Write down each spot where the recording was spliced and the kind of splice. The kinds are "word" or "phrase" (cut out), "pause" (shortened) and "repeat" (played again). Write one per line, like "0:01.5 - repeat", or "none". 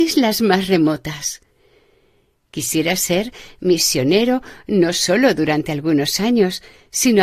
none